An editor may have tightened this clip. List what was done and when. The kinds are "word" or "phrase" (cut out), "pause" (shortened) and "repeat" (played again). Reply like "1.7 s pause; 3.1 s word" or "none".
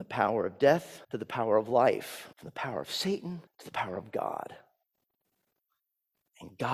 1.0 s pause; 2.3 s pause; 3.5 s pause